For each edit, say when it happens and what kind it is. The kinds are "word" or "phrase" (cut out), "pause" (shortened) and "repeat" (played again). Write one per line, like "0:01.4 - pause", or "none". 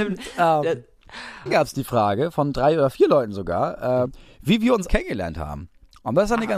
0:01.5 - word
0:04.1 - word
0:04.9 - word